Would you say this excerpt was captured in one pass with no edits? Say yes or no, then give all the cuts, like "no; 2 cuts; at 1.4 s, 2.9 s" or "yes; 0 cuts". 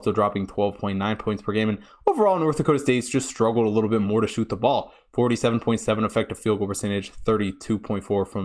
yes; 0 cuts